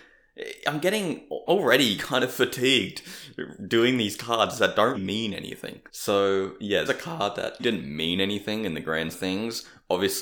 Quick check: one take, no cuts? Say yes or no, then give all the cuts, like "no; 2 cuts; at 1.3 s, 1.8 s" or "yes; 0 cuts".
no; 7 cuts; at 1.5 s, 2.0 s, 4.9 s, 5.9 s, 6.9 s, 7.6 s, 9.1 s